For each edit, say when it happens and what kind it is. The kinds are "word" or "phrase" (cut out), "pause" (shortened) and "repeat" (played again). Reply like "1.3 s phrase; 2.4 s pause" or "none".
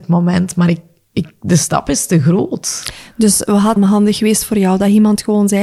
3.8 s word